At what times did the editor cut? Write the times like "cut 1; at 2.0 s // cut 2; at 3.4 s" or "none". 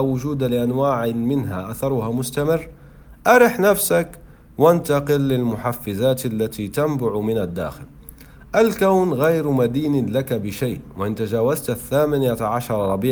none